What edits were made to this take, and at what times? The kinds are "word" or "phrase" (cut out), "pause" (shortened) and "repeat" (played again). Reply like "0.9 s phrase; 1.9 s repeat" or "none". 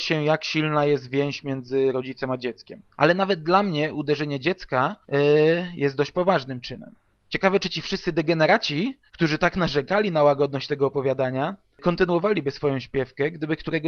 2.9 s pause; 5.0 s pause; 7.1 s pause; 9.1 s pause